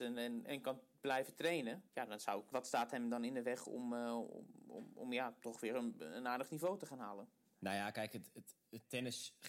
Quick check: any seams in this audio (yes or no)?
yes